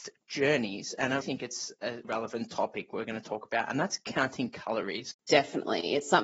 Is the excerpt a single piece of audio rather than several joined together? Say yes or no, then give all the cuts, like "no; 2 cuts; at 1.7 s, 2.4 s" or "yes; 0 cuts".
no; 2 cuts; at 1.2 s, 2.0 s